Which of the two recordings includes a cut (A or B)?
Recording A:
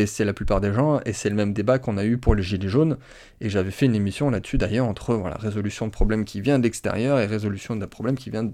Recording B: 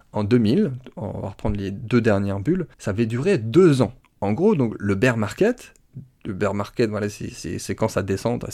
B